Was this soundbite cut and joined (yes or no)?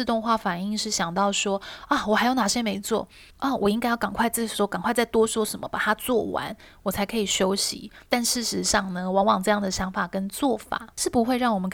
yes